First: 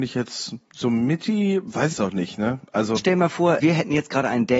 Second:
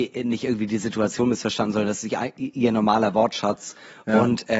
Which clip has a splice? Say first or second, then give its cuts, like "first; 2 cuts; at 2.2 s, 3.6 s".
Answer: first; 3 cuts; at 1.9 s, 3.0 s, 3.6 s